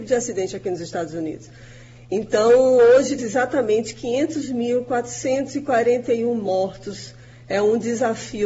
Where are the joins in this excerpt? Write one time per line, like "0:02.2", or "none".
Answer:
0:03.2

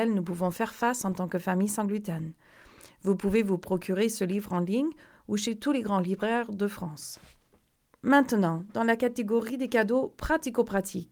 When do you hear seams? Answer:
none

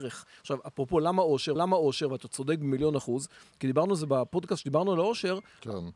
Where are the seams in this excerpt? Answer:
0:01.6

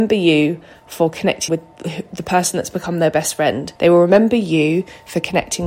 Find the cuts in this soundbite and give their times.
0:01.5
0:03.8

